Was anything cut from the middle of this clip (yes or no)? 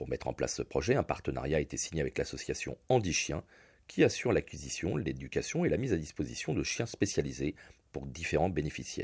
no